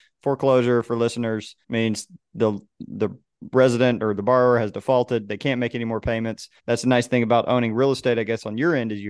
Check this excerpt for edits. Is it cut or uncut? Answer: cut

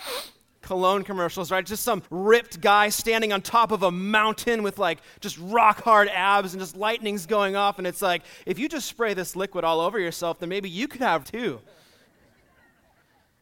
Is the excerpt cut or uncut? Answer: cut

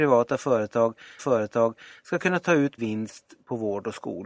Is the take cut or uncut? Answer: cut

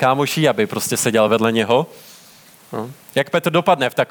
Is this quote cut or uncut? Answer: uncut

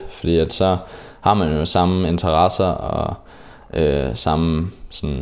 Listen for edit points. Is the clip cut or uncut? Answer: uncut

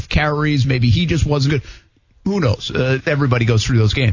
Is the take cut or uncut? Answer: cut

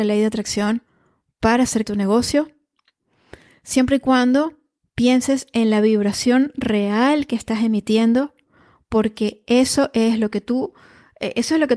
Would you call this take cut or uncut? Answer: cut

